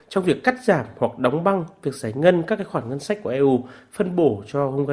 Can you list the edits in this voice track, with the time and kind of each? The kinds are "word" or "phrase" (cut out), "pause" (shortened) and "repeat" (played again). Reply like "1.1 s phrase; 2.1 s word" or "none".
none